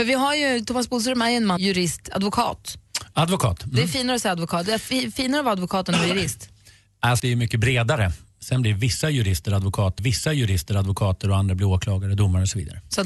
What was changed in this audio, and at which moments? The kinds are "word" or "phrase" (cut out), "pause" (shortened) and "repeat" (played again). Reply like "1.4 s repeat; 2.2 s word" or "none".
1.6 s phrase; 7.2 s word; 10.0 s repeat